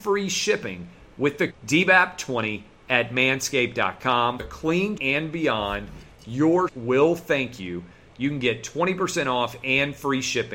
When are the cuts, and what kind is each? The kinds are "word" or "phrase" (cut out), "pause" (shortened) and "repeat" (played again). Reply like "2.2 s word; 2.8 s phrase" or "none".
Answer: 1.5 s word; 4.4 s word; 5.0 s word; 6.7 s word

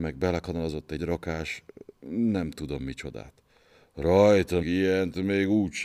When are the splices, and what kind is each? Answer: 1.0 s word; 2.0 s pause; 4.6 s phrase

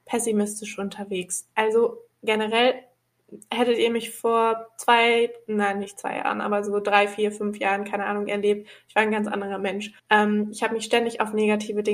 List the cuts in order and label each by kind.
10.0 s pause

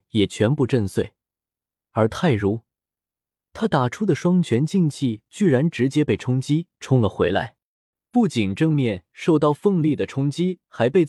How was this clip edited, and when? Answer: none

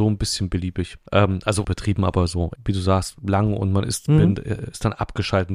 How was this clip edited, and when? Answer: 1.1 s pause; 1.6 s phrase; 2.6 s word

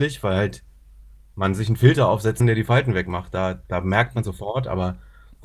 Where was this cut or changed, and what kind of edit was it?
2.4 s word; 4.2 s phrase

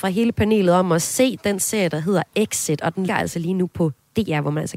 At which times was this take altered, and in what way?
3.1 s word

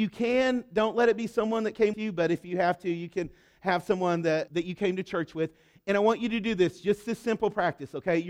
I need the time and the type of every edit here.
1.9 s word; 4.5 s word

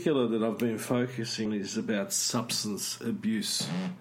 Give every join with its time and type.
1.5 s word

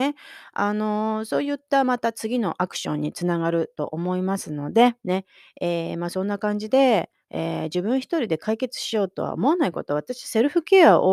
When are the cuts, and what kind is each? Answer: 5.0 s pause

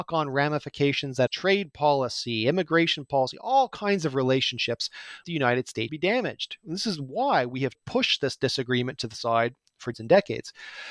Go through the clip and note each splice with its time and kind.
1.3 s word; 5.2 s word; 5.9 s word; 7.7 s phrase; 9.9 s word

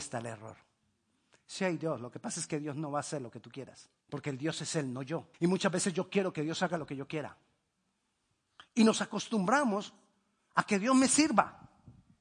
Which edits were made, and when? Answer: 4.0 s pause; 5.3 s pause

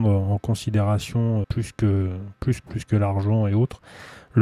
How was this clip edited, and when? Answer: 1.4 s word; 2.6 s word

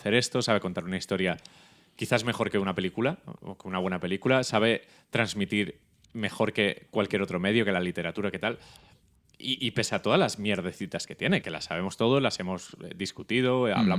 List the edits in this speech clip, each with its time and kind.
11.4 s word

